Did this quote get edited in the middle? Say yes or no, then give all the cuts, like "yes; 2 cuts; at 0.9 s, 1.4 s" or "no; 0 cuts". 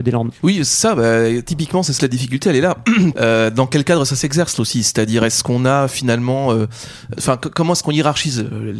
yes; 4 cuts; at 2.0 s, 3.1 s, 4.6 s, 7.1 s